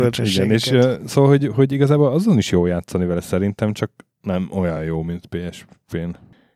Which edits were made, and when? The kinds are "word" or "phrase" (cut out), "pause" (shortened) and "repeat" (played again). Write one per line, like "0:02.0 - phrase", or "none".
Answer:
none

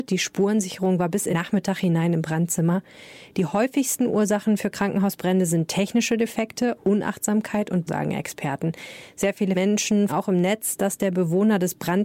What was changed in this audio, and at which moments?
0:01.3 - word
0:07.9 - word
0:10.1 - word

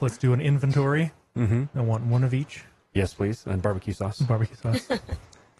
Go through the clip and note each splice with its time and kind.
none

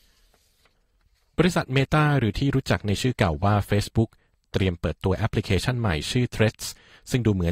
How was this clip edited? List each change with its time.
none

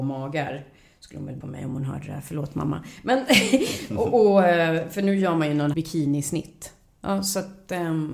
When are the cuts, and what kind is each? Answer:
0:01.4 - word
0:05.7 - word

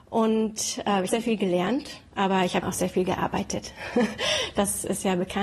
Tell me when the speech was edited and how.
0:01.1 - phrase
0:02.6 - word

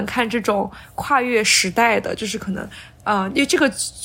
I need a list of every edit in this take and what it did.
none

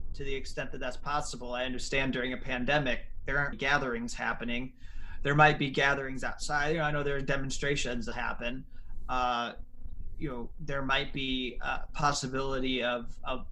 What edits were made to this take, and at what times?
0:03.5 - word
0:08.1 - word

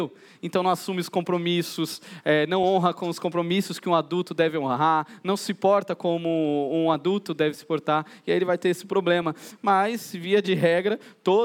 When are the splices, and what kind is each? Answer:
none

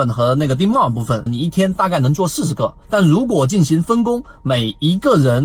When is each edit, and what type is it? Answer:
0:01.3 - phrase
0:02.8 - pause

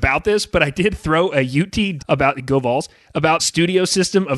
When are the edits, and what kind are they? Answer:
0:02.0 - word
0:03.4 - word

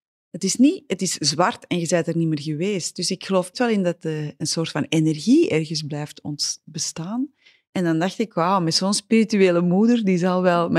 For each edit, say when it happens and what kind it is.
0:03.5 - word
0:04.4 - word

